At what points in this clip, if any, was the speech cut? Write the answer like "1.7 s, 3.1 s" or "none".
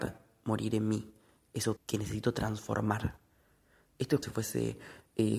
1.8 s, 4.2 s